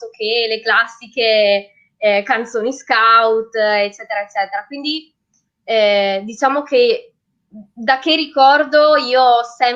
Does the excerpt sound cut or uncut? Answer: uncut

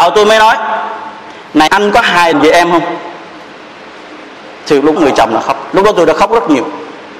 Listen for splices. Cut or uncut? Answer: cut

